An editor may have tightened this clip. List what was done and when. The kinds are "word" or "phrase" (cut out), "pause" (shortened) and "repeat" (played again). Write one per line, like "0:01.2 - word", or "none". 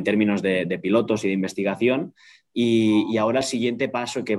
none